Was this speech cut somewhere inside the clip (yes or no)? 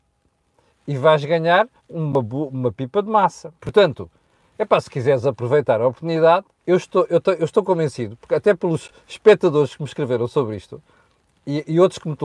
yes